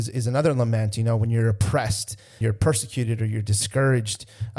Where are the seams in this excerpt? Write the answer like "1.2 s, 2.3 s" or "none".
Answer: 2.4 s